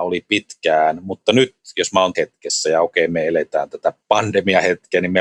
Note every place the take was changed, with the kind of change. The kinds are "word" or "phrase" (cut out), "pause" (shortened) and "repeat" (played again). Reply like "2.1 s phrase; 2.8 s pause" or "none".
2.1 s word; 4.0 s pause